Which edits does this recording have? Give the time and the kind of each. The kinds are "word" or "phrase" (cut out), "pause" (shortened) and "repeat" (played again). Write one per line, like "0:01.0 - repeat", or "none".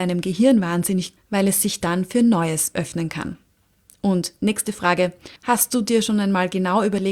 0:01.2 - phrase
0:05.4 - pause